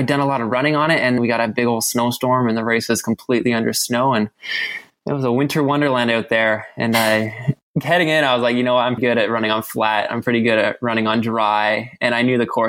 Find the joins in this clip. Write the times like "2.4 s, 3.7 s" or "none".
1.2 s, 9.0 s